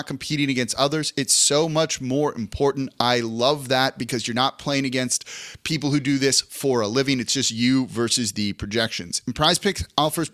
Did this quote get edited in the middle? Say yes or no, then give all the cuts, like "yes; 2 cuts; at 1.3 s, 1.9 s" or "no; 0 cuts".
no; 0 cuts